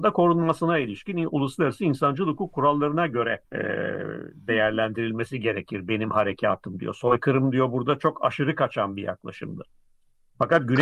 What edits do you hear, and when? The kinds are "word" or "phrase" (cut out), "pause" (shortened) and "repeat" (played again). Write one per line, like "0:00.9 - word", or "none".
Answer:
0:03.4 - pause